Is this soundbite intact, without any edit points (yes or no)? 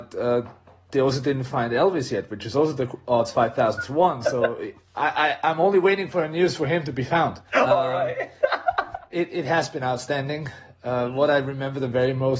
no